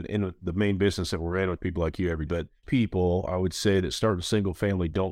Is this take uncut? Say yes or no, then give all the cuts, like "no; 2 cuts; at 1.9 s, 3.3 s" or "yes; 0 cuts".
no; 3 cuts; at 1.6 s, 2.3 s, 2.6 s